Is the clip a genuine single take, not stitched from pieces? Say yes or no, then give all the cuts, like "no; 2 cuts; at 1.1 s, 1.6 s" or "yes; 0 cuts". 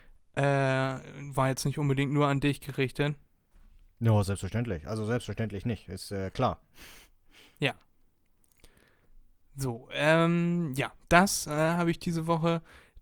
yes; 0 cuts